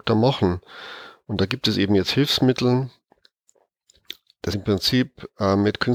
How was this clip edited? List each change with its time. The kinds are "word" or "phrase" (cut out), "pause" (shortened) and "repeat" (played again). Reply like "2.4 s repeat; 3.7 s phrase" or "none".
4.5 s word